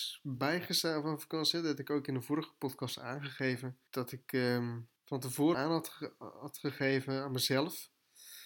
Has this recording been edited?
yes; 3 cuts; at 3.9 s, 5.0 s, 5.5 s

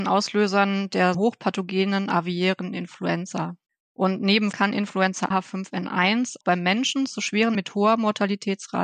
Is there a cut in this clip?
yes; 6 cuts; at 1.1 s, 3.7 s, 4.5 s, 5.3 s, 6.4 s, 7.5 s

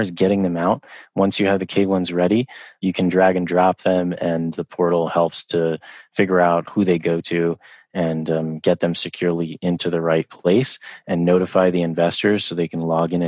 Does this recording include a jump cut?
yes; 1 cut; at 6.7 s

